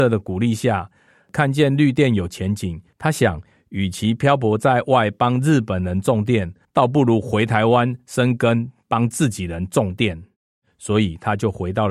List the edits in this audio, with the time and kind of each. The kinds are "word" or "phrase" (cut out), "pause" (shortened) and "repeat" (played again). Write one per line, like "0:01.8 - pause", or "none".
0:02.9 - pause
0:06.6 - pause